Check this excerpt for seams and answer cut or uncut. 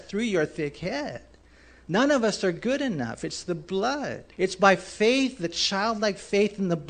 cut